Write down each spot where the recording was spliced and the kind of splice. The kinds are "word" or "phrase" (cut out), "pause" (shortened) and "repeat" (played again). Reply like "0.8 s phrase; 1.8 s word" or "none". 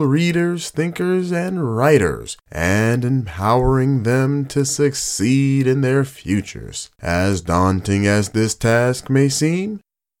2.4 s pause; 6.9 s pause